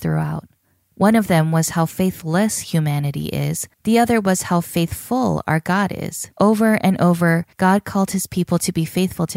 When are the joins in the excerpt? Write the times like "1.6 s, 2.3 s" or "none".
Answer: 3.7 s, 6.3 s, 7.5 s